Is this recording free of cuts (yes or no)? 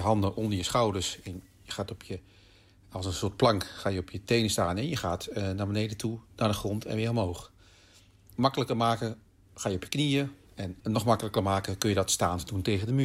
yes